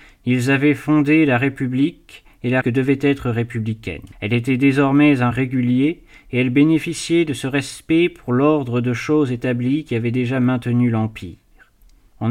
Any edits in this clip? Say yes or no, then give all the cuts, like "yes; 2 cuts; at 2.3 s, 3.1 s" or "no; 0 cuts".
yes; 3 cuts; at 2.6 s, 4.1 s, 5.3 s